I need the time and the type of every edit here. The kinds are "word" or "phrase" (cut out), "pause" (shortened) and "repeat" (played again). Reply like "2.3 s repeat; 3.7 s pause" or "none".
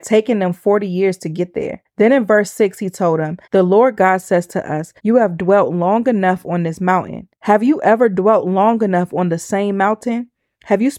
1.8 s pause; 3.4 s pause; 5.0 s pause; 7.3 s pause